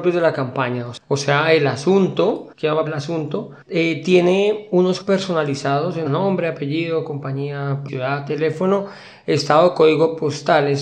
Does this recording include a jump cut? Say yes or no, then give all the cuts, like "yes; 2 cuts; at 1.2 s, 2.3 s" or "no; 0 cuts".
yes; 6 cuts; at 2.5 s, 2.9 s, 3.6 s, 5.0 s, 6.1 s, 7.9 s